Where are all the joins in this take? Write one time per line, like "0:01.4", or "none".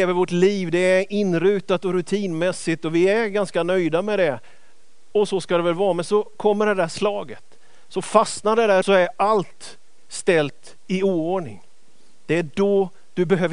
0:08.8